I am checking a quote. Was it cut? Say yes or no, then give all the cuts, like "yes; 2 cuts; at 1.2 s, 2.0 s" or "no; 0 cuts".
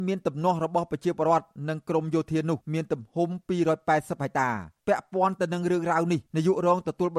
yes; 3 cuts; at 2.6 s, 4.8 s, 6.3 s